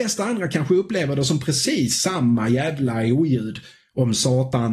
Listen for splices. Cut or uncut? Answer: uncut